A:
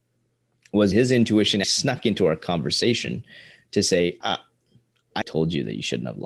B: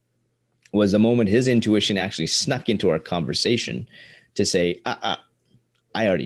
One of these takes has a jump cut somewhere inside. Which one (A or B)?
A